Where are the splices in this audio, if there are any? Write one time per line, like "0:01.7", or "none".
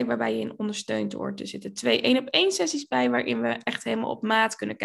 none